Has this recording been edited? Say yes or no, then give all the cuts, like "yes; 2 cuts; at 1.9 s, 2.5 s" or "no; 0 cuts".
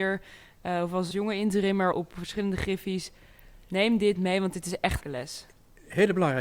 yes; 3 cuts; at 1.1 s, 1.9 s, 5.0 s